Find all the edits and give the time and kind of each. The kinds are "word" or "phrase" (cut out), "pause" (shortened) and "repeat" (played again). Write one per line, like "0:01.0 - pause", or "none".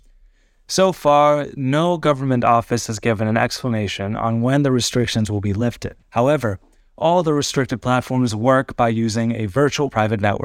0:06.0 - pause